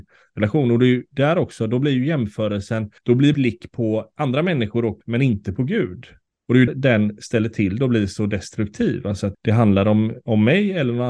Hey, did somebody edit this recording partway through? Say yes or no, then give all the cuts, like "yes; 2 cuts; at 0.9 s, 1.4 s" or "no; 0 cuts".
yes; 6 cuts; at 3.0 s, 3.3 s, 5.0 s, 6.2 s, 6.7 s, 9.3 s